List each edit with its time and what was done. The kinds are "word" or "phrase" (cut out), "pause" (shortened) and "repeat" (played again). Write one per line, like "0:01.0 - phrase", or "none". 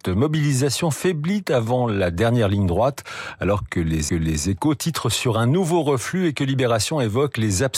0:04.1 - repeat